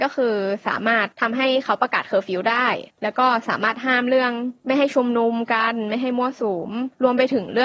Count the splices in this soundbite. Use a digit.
2